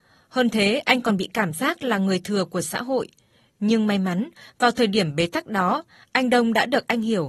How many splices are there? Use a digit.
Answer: 0